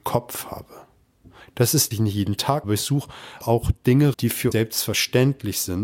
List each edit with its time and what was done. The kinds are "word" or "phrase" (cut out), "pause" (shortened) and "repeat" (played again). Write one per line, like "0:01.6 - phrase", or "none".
0:01.9 - phrase
0:02.6 - word
0:03.4 - word
0:04.1 - word
0:04.5 - word

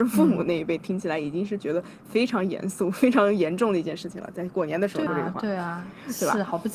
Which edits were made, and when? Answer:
0:05.1 - word

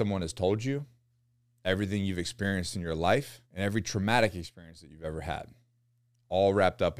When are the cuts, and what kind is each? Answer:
0:03.5 - pause

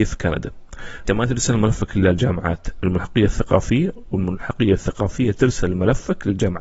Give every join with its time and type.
0:01.0 - word
0:02.8 - word

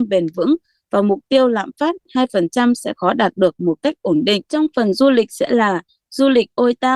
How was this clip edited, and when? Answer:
0:04.5 - pause

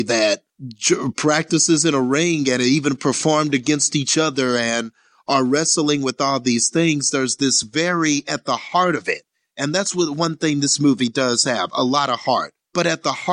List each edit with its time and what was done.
none

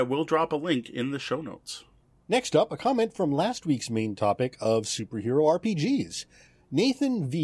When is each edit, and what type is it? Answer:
none

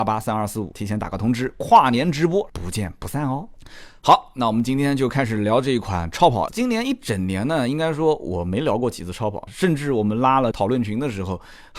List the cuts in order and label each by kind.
0:06.5 - word

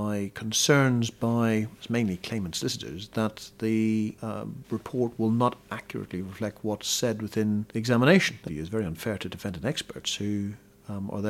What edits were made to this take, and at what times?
0:08.5 - phrase

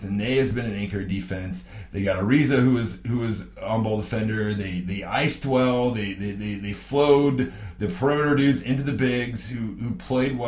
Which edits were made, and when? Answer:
none

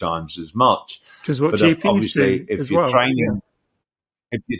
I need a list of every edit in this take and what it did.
none

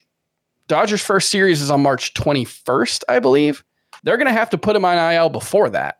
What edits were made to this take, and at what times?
0:04.0 - pause

